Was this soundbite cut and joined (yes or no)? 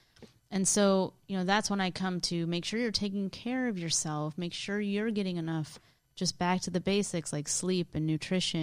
no